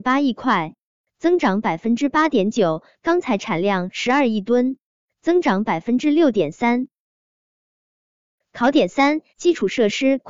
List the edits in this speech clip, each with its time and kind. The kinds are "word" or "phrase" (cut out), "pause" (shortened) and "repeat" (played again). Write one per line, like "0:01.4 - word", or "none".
0:09.3 - pause